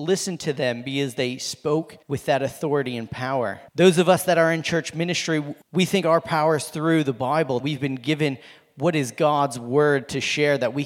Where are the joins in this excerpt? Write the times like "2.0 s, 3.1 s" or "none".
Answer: 2.0 s, 3.7 s, 5.6 s, 7.6 s